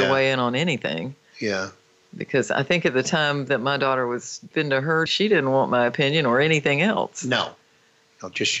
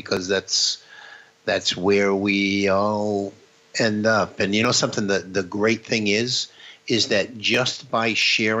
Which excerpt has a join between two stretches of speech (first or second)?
first